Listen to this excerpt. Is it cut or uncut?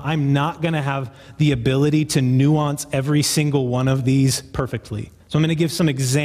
cut